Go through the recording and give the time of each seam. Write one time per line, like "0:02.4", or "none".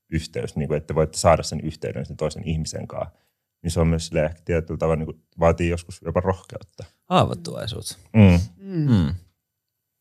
none